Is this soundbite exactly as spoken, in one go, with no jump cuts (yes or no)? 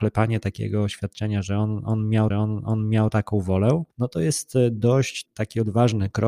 no